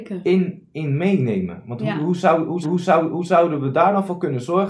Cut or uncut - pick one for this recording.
cut